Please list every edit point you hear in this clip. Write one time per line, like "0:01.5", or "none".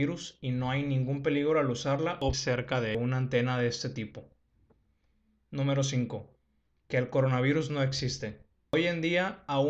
0:02.3